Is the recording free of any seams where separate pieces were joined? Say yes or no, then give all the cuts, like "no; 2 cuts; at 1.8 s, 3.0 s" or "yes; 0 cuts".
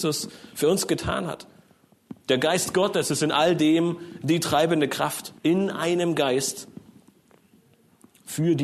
no; 1 cut; at 5.4 s